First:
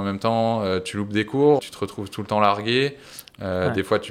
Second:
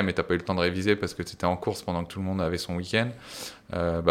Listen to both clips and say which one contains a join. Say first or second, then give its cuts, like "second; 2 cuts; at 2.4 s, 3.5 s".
first; 1 cut; at 1.6 s